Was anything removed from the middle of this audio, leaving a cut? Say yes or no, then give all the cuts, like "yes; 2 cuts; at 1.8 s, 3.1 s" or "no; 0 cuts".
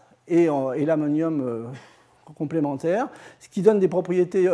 no; 0 cuts